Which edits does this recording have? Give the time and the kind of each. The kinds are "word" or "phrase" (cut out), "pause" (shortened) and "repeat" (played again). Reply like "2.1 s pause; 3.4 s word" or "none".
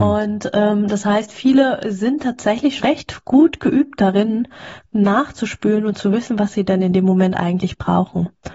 2.8 s word